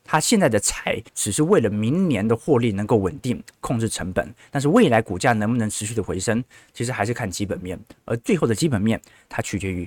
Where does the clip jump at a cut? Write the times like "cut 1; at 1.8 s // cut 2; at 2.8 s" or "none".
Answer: cut 1; at 1.1 s